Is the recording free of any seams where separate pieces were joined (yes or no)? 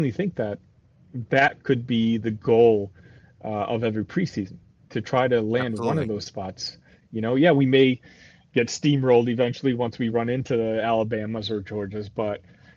yes